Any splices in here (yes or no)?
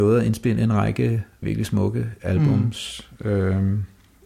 yes